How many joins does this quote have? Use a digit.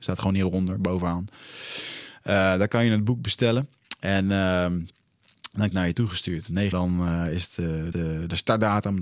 3